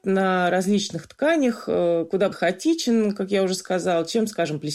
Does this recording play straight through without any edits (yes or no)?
no